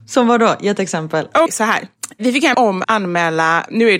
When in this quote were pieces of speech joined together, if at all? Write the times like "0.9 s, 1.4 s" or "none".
1.5 s, 2.5 s, 2.8 s